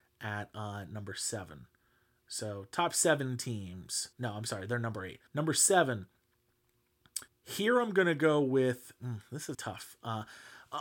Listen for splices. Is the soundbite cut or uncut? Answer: cut